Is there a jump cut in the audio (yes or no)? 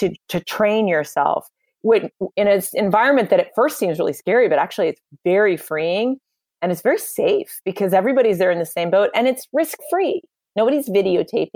no